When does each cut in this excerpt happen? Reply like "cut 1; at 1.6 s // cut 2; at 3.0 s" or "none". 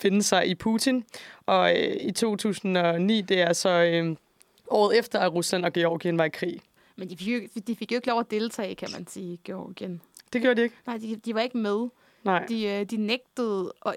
none